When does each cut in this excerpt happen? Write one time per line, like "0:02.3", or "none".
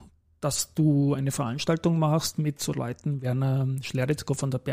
none